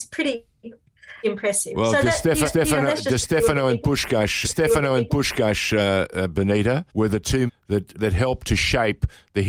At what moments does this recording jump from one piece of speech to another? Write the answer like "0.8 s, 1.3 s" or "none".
1.2 s, 2.5 s, 4.4 s, 6.9 s, 7.5 s, 7.9 s

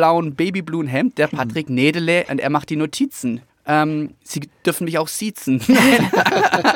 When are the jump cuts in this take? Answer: 3.5 s

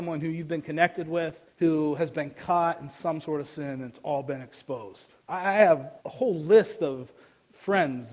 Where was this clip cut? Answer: 1.5 s, 5.2 s, 6.0 s

